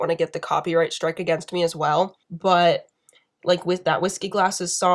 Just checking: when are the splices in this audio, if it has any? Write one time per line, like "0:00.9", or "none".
0:02.2